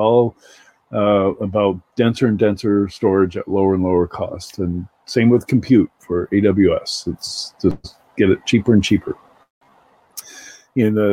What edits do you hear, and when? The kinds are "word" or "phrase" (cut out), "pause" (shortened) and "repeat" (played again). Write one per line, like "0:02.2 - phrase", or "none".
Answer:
none